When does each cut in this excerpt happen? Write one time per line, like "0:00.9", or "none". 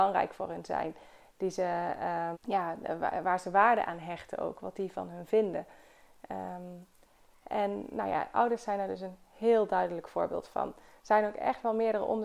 0:02.3